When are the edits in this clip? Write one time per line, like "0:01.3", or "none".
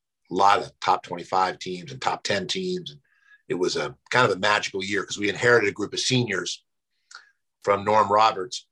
none